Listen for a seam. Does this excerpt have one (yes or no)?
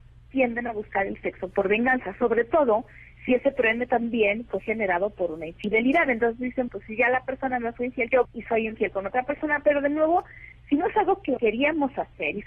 yes